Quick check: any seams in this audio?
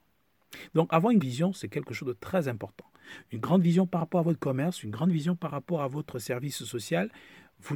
yes; 1 cut; at 1.2 s

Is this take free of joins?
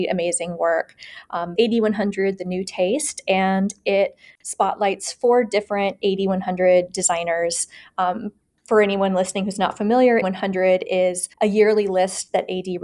no; 3 cuts; at 1.6 s, 10.2 s, 11.3 s

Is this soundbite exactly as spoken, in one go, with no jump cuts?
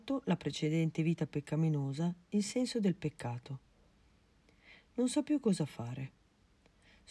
yes; 0 cuts

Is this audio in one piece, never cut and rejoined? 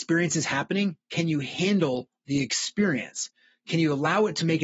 yes; 0 cuts

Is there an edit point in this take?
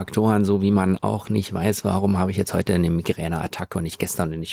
no; 0 cuts

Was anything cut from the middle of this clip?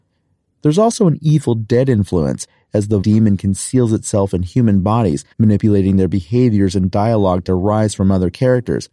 yes; 3 cuts; at 3.0 s, 5.3 s, 7.5 s

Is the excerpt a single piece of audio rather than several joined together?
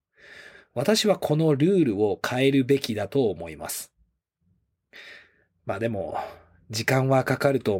yes; 0 cuts

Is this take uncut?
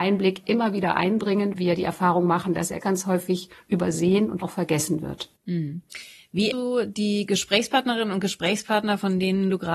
no; 4 cuts; at 1.5 s, 2.8 s, 4.4 s, 6.5 s

